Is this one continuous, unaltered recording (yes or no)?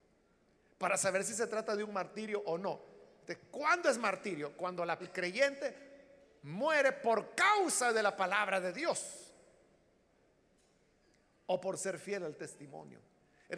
no